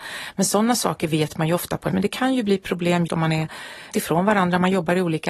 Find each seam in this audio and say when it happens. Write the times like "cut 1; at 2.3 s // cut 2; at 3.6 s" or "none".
cut 1; at 1.9 s // cut 2; at 3.1 s // cut 3; at 3.9 s